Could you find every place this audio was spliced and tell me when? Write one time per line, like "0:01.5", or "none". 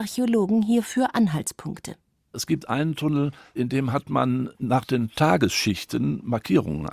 none